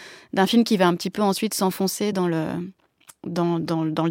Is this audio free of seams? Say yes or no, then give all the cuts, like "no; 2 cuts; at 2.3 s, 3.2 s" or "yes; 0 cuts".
yes; 0 cuts